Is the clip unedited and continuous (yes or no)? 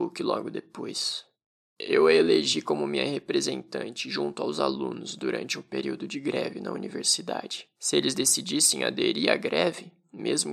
yes